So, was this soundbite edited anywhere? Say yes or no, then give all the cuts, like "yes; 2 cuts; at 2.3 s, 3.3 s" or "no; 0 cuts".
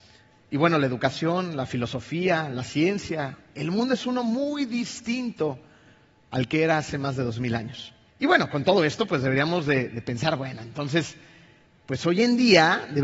yes; 1 cut; at 8.1 s